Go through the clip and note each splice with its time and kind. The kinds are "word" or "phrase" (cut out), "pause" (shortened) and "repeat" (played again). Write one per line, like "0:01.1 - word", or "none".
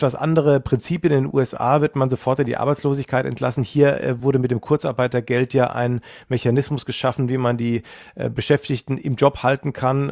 none